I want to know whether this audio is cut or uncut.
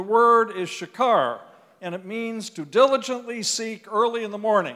uncut